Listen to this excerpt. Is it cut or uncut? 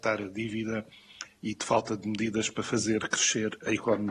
uncut